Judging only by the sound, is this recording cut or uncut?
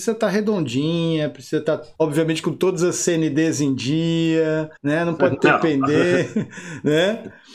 cut